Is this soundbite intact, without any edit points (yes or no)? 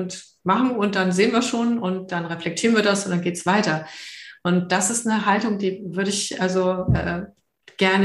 yes